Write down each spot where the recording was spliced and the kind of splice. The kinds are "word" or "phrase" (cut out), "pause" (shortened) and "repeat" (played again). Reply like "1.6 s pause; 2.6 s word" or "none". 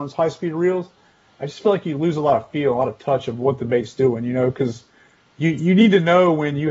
none